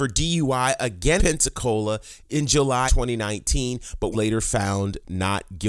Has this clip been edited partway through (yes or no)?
yes